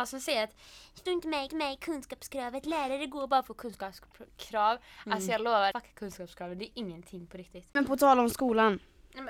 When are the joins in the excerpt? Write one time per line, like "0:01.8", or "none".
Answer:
0:01.1
0:01.5
0:05.7
0:07.7